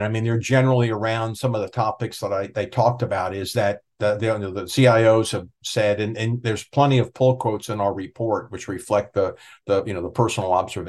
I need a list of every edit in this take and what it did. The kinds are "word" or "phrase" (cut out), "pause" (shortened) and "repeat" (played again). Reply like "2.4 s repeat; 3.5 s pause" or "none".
none